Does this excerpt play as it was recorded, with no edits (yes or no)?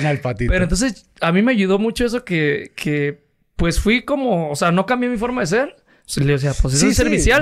yes